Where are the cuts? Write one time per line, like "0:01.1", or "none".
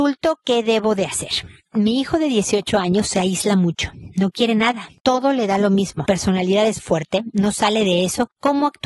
0:06.1
0:06.8